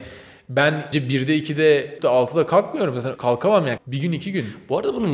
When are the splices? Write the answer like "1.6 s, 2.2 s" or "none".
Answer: 0.9 s, 2.0 s, 3.2 s, 3.8 s